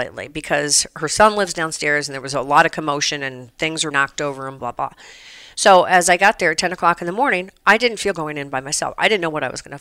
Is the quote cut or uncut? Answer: cut